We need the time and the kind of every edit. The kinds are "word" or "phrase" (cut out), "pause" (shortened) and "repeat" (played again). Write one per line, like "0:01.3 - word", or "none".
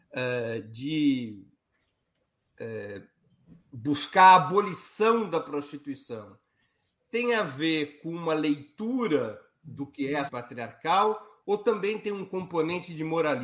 0:10.3 - word

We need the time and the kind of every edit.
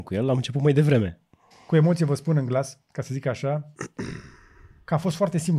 0:01.5 - pause
0:02.8 - pause

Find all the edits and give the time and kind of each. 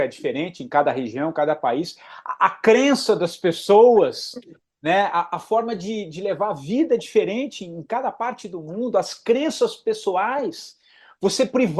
none

